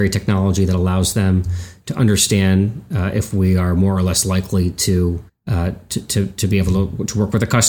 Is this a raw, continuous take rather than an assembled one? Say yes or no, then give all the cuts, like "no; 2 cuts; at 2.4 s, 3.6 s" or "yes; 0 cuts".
no; 1 cut; at 5.3 s